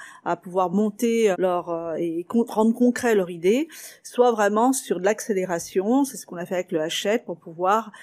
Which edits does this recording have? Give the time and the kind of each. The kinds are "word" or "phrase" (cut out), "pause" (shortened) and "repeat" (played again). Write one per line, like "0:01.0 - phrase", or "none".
0:01.3 - word